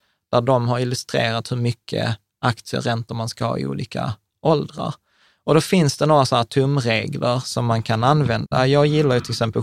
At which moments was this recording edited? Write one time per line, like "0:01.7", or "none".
none